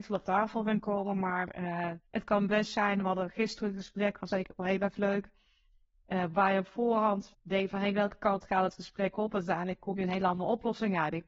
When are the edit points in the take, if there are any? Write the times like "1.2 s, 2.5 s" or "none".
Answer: 2.1 s